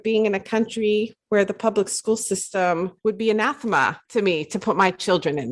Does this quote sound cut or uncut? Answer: cut